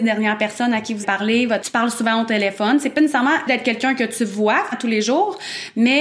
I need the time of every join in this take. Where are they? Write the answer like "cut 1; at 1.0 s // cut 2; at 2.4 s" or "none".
cut 1; at 1.0 s // cut 2; at 1.6 s // cut 3; at 3.5 s // cut 4; at 4.7 s